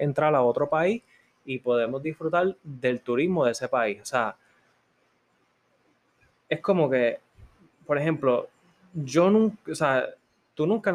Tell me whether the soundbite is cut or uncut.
uncut